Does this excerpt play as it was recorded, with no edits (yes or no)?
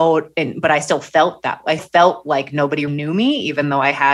no